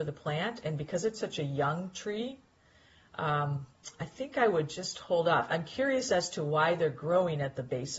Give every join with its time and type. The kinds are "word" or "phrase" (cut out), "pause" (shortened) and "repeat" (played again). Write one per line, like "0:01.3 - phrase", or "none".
none